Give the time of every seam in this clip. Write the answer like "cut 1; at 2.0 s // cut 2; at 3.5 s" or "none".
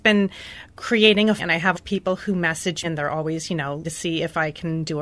cut 1; at 1.4 s // cut 2; at 1.7 s // cut 3; at 2.8 s // cut 4; at 3.8 s